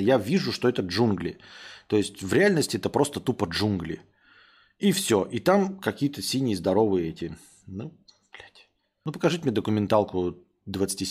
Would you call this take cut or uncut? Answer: uncut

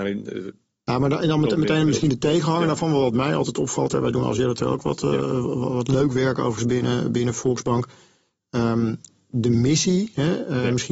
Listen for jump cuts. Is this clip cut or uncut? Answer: uncut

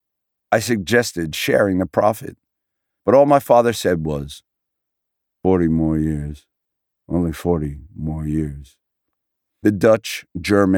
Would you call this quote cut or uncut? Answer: uncut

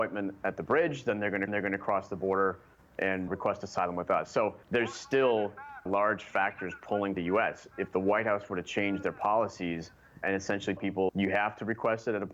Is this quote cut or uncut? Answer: cut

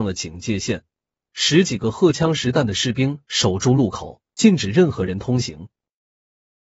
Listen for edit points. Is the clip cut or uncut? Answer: cut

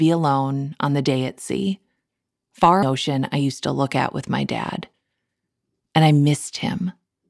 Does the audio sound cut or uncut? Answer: cut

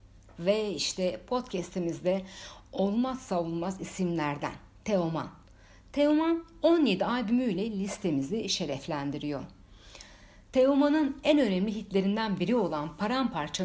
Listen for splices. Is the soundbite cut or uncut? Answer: uncut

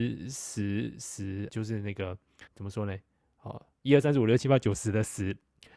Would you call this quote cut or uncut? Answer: cut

